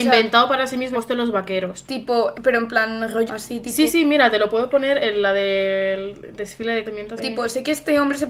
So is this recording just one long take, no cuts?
no; 6 cuts; at 0.9 s, 2.3 s, 3.3 s, 3.9 s, 6.8 s, 7.2 s

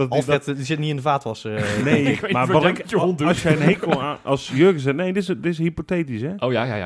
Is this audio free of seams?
yes; 0 cuts

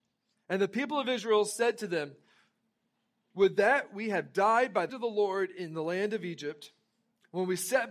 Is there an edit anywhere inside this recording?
yes; 1 cut; at 4.9 s

